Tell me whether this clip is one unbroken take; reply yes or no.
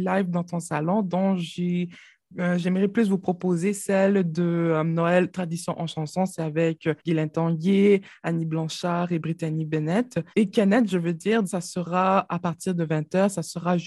no